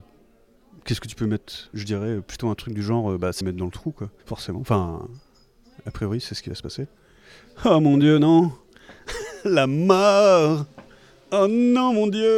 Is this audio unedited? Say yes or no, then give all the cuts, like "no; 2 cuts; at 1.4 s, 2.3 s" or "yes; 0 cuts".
no; 3 cuts; at 1.7 s, 3.4 s, 4.2 s